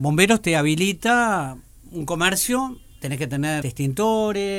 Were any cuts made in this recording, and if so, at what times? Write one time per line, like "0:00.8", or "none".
0:03.6